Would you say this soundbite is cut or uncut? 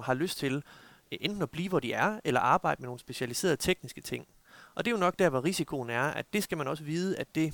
uncut